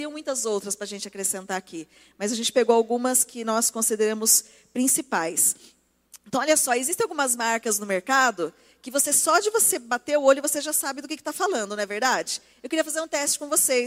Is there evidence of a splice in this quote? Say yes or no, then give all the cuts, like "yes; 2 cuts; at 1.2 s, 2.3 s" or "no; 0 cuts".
no; 0 cuts